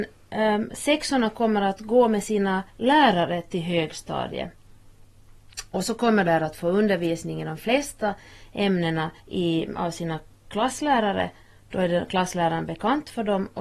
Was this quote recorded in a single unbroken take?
no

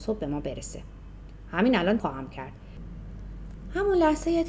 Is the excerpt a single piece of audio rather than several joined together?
no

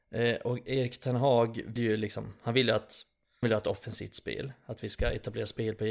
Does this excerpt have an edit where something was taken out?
yes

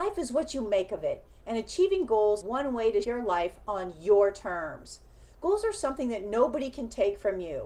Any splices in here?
yes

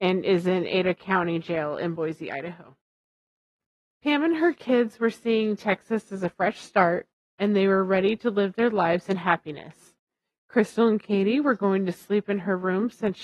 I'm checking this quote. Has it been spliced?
no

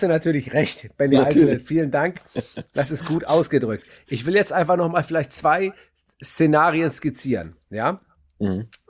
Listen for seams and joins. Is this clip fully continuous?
yes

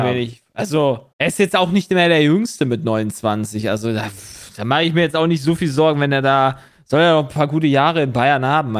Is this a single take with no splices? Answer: no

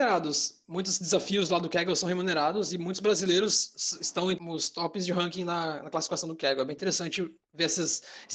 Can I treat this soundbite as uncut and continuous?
no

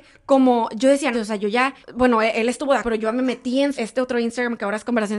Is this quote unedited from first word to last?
no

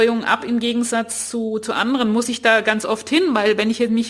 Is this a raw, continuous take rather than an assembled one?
yes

